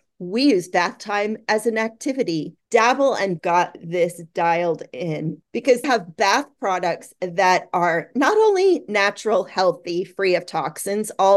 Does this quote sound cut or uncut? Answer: cut